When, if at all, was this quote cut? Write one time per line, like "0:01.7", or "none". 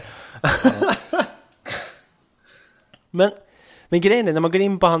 none